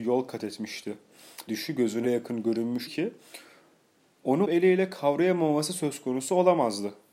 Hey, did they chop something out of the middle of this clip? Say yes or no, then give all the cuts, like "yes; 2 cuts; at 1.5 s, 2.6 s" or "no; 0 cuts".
yes; 4 cuts; at 1.5 s, 2.0 s, 2.9 s, 4.4 s